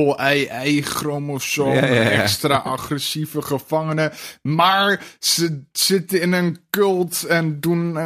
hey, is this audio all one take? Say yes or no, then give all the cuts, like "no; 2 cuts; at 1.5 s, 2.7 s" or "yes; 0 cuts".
yes; 0 cuts